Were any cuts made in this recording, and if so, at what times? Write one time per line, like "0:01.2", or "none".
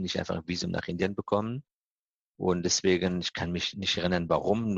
none